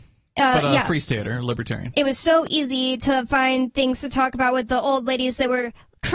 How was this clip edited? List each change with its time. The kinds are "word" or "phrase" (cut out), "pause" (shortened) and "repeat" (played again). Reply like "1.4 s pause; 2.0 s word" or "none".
none